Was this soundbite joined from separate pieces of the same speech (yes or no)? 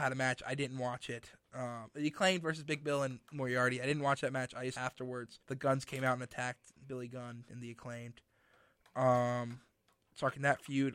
yes